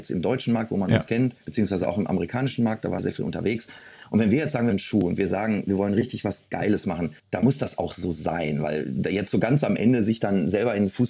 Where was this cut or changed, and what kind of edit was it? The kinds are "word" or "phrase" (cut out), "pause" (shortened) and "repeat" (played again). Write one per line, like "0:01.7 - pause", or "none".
0:01.4 - pause
0:03.0 - word
0:04.7 - word
0:07.2 - pause